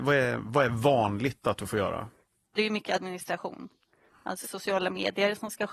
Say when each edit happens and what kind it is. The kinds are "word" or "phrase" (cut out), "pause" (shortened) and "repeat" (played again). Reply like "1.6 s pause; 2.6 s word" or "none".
4.4 s word